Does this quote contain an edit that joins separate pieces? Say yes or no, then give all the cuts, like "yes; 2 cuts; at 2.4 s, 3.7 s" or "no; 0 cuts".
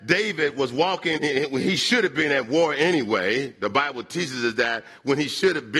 yes; 1 cut; at 1.2 s